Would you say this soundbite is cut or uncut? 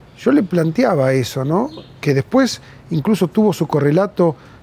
uncut